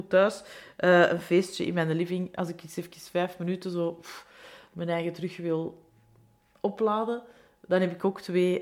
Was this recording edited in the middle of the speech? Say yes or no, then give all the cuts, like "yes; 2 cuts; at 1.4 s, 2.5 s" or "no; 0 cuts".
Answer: no; 0 cuts